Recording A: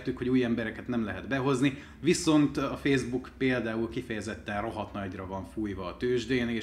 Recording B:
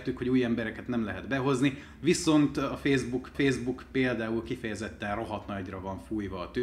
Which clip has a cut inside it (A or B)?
B